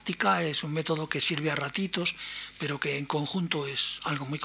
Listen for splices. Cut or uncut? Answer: uncut